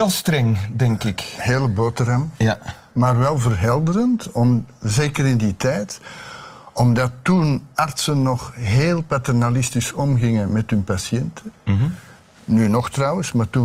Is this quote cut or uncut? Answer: uncut